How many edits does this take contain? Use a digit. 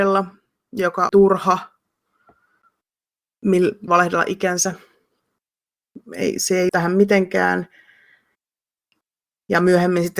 4